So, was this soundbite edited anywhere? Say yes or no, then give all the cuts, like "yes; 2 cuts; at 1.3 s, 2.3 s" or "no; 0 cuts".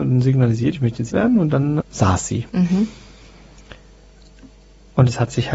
yes; 3 cuts; at 1.1 s, 1.8 s, 2.5 s